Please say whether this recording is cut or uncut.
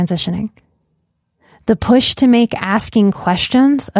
uncut